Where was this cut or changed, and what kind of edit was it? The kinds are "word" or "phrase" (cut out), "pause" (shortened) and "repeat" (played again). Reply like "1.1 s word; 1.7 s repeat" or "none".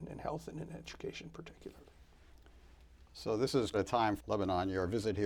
3.7 s word; 4.2 s word